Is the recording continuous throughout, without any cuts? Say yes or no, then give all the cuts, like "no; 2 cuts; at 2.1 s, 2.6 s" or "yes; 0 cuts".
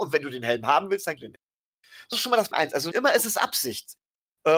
no; 4 cuts; at 1.2 s, 2.1 s, 2.5 s, 2.9 s